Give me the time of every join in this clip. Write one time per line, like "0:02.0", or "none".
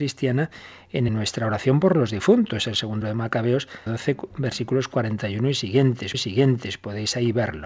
0:01.1
0:03.0
0:03.9
0:06.1